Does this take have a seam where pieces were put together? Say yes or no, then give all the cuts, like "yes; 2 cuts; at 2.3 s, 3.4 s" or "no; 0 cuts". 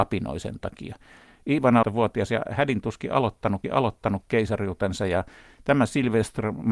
yes; 2 cuts; at 1.8 s, 3.6 s